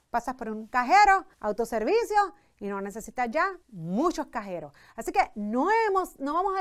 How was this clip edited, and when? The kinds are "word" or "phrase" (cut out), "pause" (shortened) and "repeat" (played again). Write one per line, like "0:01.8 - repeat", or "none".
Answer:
0:01.3 - pause
0:03.6 - pause